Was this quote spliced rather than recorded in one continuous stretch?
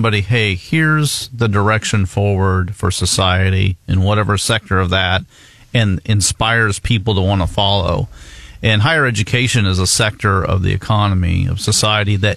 no; 0 cuts

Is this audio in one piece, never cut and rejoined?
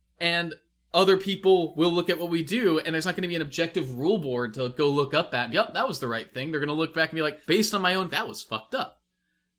no; 3 cuts; at 5.5 s, 7.4 s, 8.1 s

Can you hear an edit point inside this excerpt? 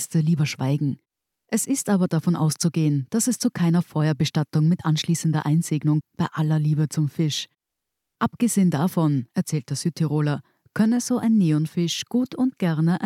yes; 1 cut; at 6.0 s

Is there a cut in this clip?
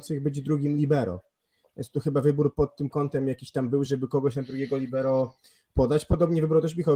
no; 0 cuts

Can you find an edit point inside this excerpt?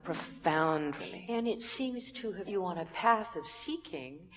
yes; 2 cuts; at 1.0 s, 2.4 s

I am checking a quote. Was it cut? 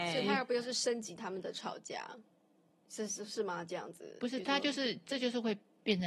no; 0 cuts

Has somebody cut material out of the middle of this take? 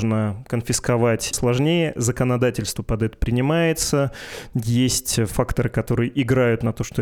yes; 1 cut; at 1.3 s

